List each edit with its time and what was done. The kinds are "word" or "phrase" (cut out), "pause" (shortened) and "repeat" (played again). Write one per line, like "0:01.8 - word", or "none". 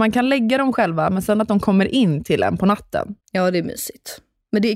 0:03.2 - pause